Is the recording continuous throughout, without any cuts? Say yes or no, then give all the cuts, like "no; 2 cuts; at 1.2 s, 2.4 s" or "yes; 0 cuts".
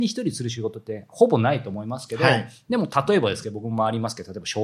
yes; 0 cuts